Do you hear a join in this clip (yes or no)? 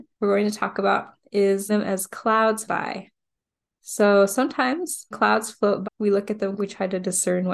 yes